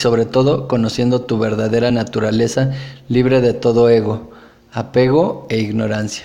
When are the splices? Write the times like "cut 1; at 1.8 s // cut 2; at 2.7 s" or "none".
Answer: none